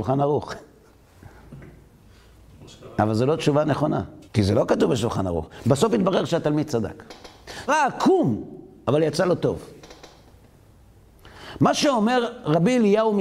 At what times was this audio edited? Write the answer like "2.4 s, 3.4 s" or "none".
4.3 s, 7.7 s